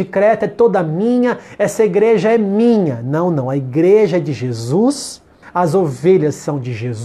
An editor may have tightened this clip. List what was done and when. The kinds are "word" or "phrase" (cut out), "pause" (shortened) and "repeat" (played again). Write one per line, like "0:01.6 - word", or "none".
0:05.4 - pause